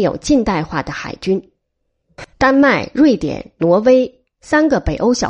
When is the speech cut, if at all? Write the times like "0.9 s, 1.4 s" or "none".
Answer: 2.3 s